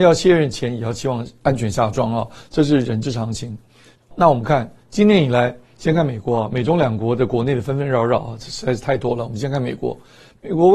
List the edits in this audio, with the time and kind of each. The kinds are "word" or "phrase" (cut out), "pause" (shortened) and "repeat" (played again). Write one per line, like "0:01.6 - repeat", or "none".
none